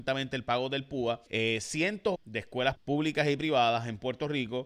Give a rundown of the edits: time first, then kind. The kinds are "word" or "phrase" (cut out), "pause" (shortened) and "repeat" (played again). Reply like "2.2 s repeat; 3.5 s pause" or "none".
1.3 s pause; 2.1 s phrase; 2.7 s word